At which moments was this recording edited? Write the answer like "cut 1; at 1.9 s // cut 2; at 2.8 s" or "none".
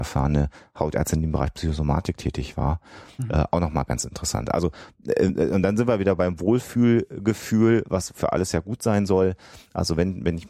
none